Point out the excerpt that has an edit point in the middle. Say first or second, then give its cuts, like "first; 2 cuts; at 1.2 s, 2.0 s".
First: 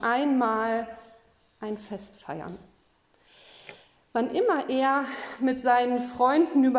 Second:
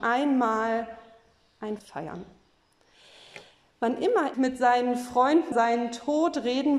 second; 3 cuts; at 1.8 s, 4.3 s, 5.5 s